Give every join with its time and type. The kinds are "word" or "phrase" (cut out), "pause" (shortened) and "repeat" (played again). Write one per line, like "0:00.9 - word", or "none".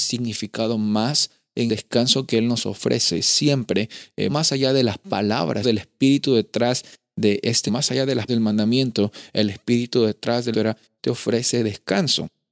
0:01.7 - word
0:04.3 - word
0:05.6 - word
0:07.7 - word
0:08.3 - word
0:10.5 - word
0:11.0 - word

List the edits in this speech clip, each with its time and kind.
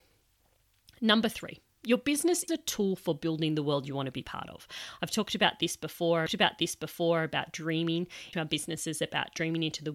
0:02.5 - word
0:06.3 - repeat
0:08.3 - word

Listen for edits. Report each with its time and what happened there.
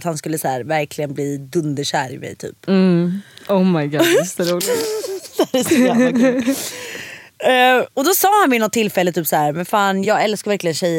0:10.0 - word

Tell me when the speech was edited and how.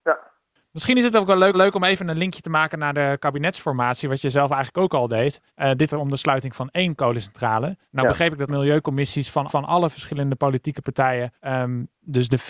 0:01.5 - repeat
0:05.5 - pause
0:05.9 - word
0:07.8 - pause
0:08.5 - word
0:09.5 - repeat
0:11.4 - pause

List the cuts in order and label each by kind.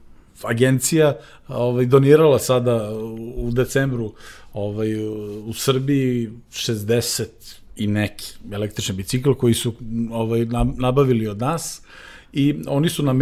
none

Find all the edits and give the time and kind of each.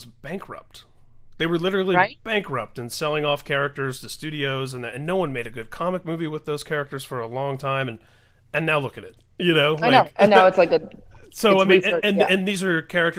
none

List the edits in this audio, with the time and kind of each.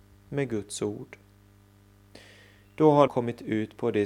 0:03.1 - word

